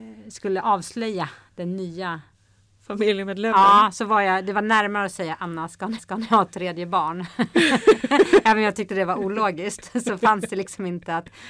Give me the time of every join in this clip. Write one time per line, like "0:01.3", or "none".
0:06.0

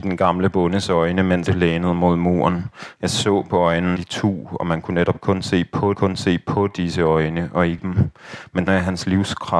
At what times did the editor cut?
0:01.5
0:04.0
0:05.9
0:07.8
0:08.7

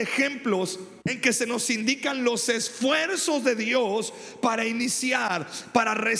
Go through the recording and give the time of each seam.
0:01.0

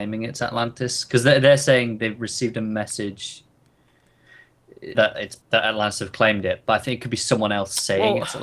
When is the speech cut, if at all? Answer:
0:04.9
0:05.4

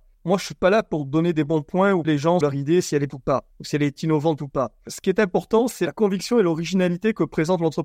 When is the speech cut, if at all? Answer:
0:02.0
0:02.4
0:03.1

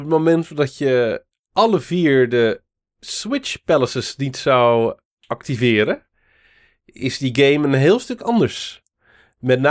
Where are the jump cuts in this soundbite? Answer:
none

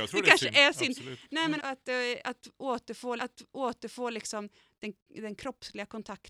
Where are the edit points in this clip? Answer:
0:01.6
0:03.2

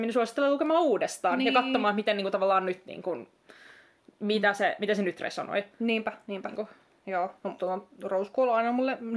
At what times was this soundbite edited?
0:07.6

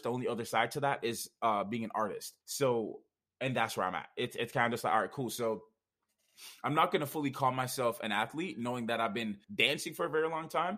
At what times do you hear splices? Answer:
0:02.4
0:09.4

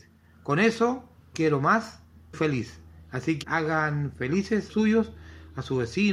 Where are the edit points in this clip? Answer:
0:01.3
0:02.3
0:03.4
0:04.7

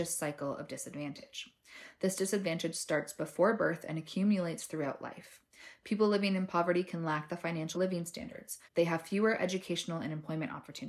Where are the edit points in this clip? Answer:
0:07.7
0:08.6

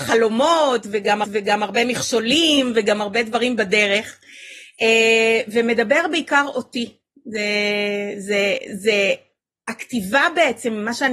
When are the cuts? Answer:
0:01.2

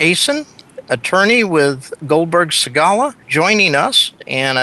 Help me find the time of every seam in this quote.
0:03.2

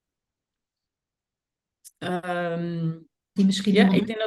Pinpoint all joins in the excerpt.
0:03.4

